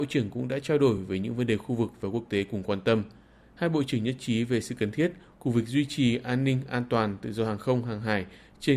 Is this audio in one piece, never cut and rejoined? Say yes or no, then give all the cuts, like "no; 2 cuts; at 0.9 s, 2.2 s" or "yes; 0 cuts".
yes; 0 cuts